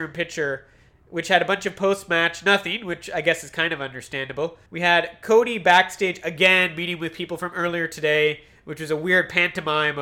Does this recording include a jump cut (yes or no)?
yes